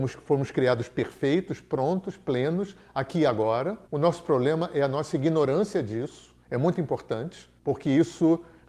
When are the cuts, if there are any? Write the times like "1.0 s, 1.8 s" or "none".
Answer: 3.9 s, 6.4 s, 7.6 s